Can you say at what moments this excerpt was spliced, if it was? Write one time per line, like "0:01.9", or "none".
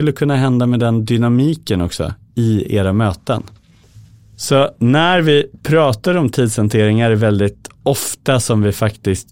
none